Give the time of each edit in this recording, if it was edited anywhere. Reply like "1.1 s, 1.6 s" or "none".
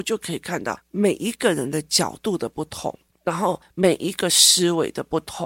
none